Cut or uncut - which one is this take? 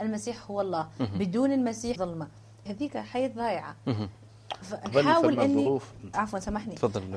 cut